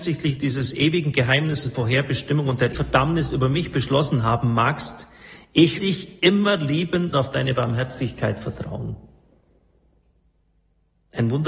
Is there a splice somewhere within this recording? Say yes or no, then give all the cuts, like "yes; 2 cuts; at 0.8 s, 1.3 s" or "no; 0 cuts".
yes; 4 cuts; at 1.7 s, 2.7 s, 5.8 s, 7.1 s